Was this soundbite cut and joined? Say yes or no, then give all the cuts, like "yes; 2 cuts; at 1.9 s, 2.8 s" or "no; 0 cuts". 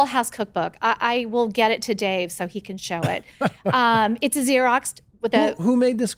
no; 0 cuts